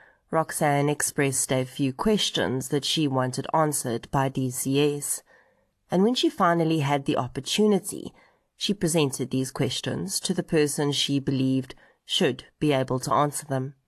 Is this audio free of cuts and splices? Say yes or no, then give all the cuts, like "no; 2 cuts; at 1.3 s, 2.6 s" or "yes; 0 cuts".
yes; 0 cuts